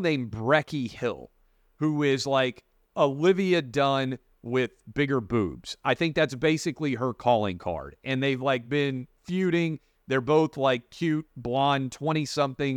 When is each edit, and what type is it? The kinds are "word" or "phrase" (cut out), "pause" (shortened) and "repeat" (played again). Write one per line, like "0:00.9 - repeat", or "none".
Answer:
none